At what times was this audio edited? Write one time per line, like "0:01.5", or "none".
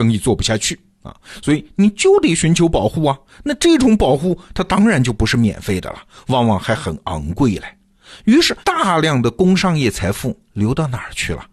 0:08.6

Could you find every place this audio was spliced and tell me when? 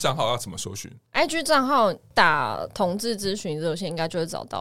0:01.1

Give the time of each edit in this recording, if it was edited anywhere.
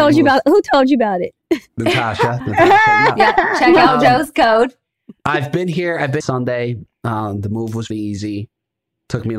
0:06.2
0:07.9

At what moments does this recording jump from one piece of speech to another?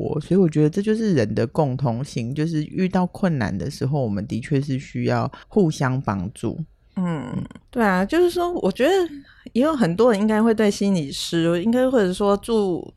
0:05.4
0:07.7

